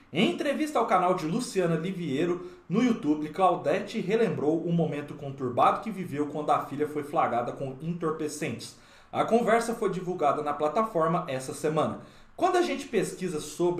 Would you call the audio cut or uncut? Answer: uncut